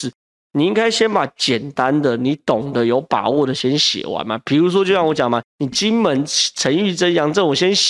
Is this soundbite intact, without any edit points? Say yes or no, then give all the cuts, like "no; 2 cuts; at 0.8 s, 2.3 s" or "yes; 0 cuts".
no; 1 cut; at 5.5 s